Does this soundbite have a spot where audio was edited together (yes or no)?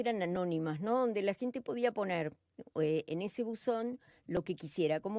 no